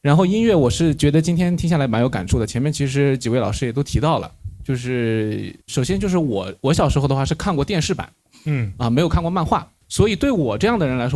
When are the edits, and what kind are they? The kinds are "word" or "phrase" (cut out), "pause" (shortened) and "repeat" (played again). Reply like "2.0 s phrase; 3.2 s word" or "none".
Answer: 5.6 s pause; 9.8 s pause